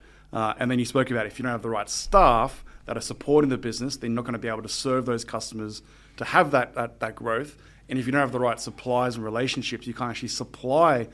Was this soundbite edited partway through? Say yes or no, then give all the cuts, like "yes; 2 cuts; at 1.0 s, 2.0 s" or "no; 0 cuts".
no; 0 cuts